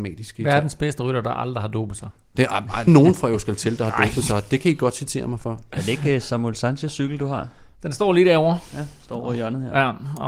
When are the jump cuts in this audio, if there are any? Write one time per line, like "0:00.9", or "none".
0:02.9